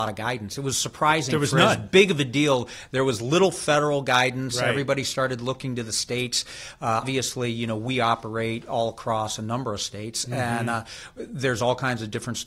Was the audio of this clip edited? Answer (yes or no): yes